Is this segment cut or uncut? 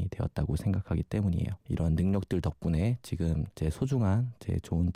cut